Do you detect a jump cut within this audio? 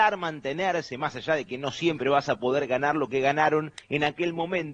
yes; 1 cut; at 3.8 s

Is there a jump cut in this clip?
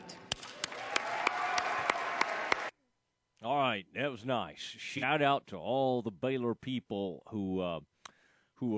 no; 0 cuts

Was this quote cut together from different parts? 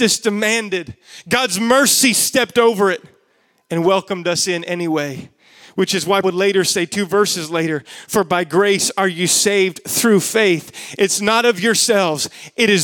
yes; 1 cut; at 6.2 s

